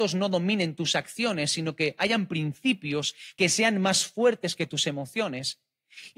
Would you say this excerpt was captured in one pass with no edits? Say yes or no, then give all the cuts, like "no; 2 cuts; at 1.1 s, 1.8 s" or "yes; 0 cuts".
yes; 0 cuts